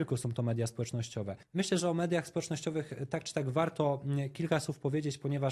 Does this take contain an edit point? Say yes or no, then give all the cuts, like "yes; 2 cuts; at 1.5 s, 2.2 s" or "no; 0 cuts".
yes; 1 cut; at 1.4 s